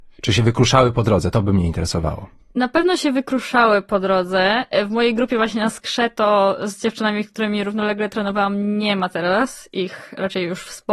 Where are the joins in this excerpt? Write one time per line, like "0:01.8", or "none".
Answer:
none

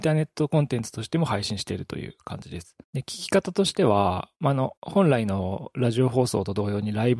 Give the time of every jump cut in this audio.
0:02.8
0:04.3
0:04.8

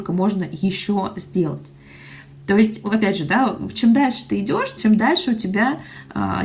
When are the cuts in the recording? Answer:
0:02.8
0:03.7
0:04.8

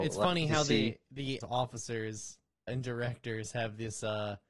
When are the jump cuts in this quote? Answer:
0:01.4
0:02.7

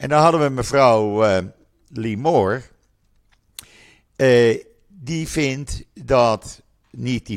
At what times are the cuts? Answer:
none

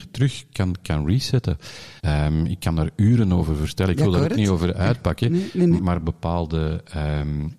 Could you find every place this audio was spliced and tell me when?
0:02.0
0:05.8

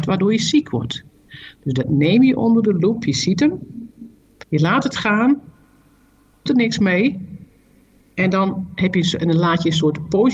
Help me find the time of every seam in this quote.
0:06.5

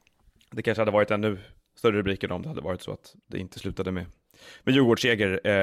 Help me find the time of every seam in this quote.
none

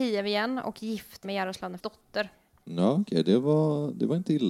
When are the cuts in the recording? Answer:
0:01.2
0:01.8

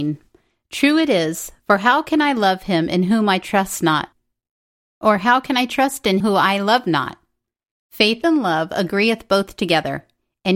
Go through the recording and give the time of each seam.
0:06.2

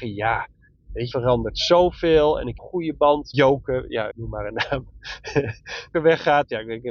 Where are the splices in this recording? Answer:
0:01.1
0:02.6
0:03.3
0:04.1
0:05.9

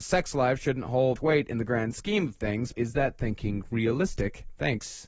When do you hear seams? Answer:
0:01.2
0:02.7

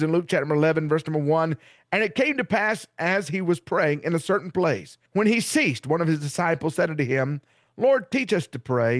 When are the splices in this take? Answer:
0:05.1

